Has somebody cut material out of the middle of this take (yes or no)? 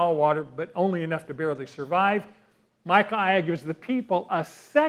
no